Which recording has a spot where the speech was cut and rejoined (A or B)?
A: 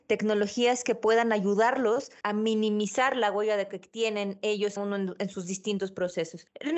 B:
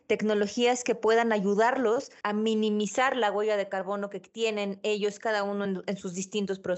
A